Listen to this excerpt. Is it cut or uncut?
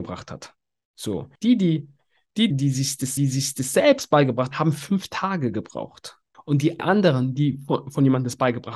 cut